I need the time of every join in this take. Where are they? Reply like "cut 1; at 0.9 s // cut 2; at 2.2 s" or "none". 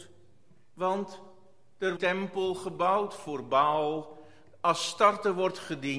cut 1; at 2.0 s